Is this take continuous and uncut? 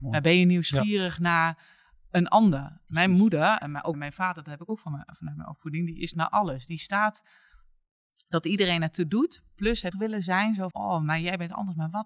no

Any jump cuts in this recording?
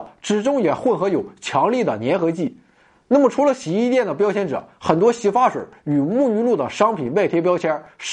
no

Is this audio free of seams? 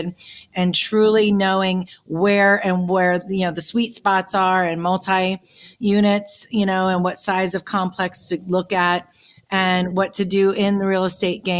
yes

